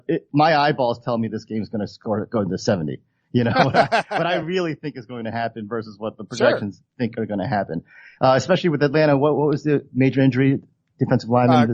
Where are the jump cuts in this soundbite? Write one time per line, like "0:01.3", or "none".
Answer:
none